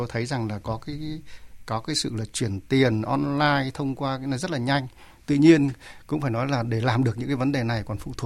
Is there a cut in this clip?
no; 0 cuts

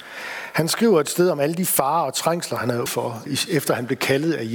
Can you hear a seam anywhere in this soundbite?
yes; 2 cuts; at 2.9 s, 3.3 s

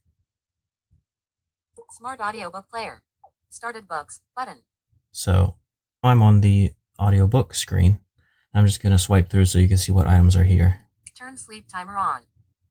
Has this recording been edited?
yes; 1 cut; at 6.0 s

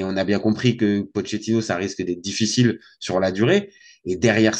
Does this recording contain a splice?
no; 0 cuts

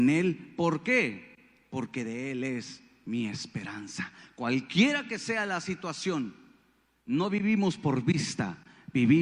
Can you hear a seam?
no; 0 cuts

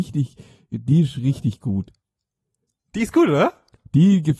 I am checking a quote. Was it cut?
no; 0 cuts

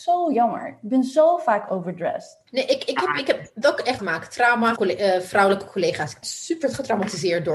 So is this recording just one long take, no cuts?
no; 5 cuts; at 2.5 s, 3.6 s, 4.0 s, 4.8 s, 6.2 s

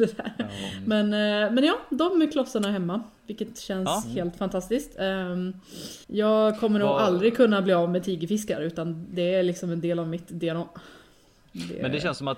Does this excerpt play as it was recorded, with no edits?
no; 1 cut; at 6.0 s

